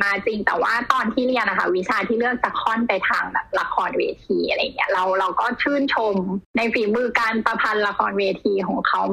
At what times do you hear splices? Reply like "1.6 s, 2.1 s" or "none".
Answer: 6.5 s